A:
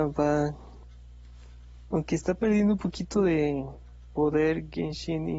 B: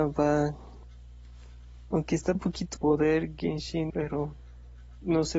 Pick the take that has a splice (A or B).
B